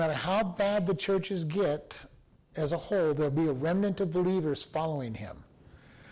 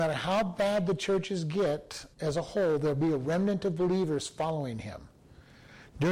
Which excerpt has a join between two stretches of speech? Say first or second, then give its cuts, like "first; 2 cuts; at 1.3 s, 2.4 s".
second; 1 cut; at 2.1 s